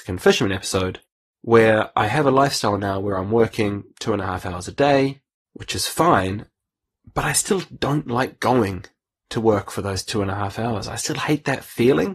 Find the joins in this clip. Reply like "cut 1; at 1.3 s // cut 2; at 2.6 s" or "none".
none